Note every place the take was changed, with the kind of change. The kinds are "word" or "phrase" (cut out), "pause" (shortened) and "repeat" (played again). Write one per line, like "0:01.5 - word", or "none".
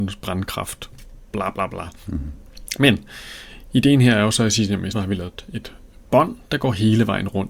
0:04.9 - word